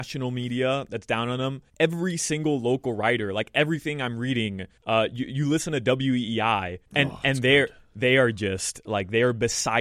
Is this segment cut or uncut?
cut